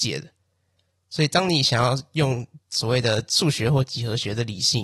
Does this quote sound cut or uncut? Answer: cut